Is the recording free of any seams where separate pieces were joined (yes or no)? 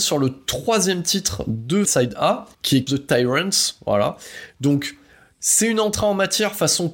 no